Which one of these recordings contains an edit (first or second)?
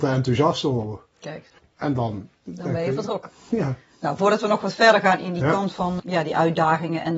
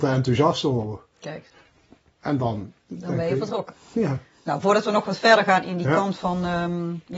first